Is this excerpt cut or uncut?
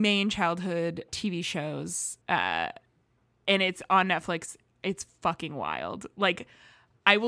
cut